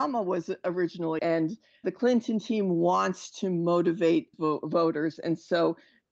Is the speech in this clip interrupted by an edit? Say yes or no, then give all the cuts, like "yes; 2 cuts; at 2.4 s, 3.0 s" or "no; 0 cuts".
yes; 2 cuts; at 1.2 s, 4.3 s